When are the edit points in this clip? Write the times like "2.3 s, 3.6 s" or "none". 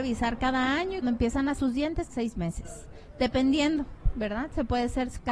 1.0 s, 1.6 s, 2.1 s